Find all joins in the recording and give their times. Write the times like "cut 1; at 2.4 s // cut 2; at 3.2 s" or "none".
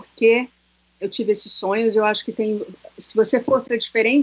none